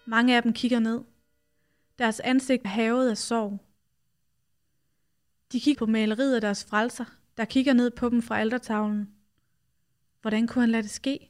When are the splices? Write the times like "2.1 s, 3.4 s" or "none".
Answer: 2.6 s, 5.7 s